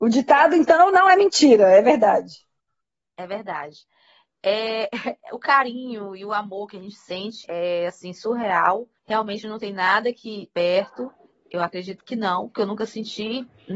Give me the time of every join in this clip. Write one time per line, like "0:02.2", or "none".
0:07.4
0:09.0
0:10.5
0:11.3